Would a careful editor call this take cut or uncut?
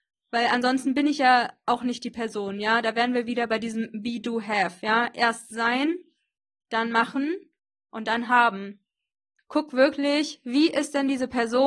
uncut